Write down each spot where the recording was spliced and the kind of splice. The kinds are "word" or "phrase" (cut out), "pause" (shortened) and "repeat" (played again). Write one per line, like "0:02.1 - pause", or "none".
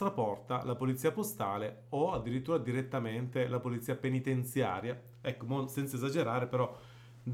none